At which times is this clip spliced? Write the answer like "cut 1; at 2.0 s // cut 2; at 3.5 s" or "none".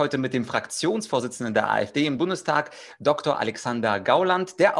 cut 1; at 2.2 s